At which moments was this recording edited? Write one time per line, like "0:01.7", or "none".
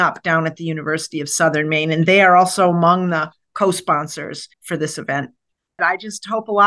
0:04.5